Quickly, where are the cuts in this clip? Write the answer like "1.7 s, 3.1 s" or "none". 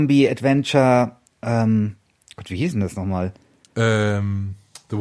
none